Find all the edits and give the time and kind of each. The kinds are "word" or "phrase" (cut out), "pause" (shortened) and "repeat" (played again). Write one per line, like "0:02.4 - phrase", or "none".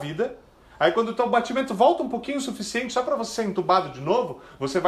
none